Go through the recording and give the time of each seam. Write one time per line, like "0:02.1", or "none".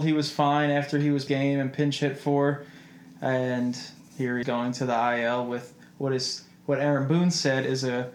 0:01.3
0:04.1
0:04.4

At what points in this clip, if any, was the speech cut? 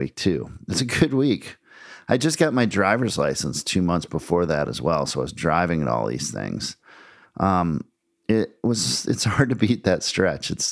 none

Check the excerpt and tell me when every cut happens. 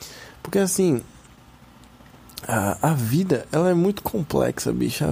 none

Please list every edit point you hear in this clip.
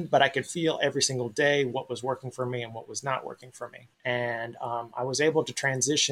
0:03.9

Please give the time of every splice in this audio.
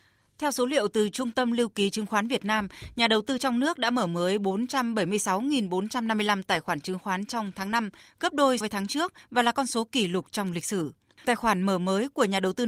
0:08.6
0:11.2

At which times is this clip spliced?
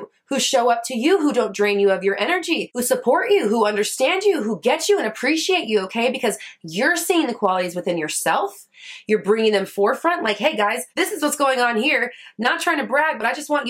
0:10.9

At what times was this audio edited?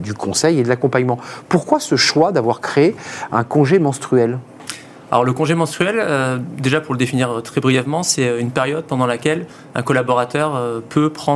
none

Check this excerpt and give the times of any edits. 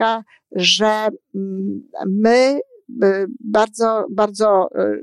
none

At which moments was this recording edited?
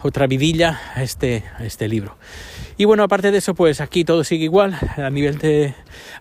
none

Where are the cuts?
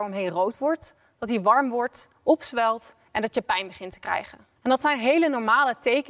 0:04.6

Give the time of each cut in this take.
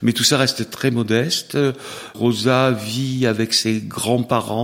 none

